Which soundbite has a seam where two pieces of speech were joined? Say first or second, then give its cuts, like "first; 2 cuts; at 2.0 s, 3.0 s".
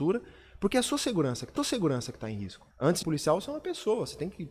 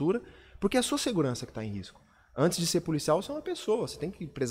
first; 3 cuts; at 1.6 s, 2.7 s, 3.0 s